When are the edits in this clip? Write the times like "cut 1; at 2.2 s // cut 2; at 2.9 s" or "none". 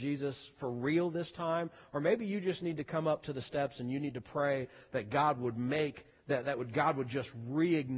none